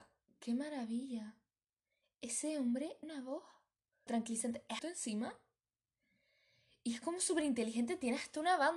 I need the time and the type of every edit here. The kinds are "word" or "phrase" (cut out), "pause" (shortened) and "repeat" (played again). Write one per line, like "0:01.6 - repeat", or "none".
0:03.0 - word
0:04.1 - word
0:04.8 - word